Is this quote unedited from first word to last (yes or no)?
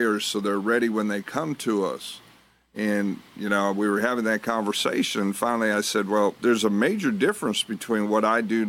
yes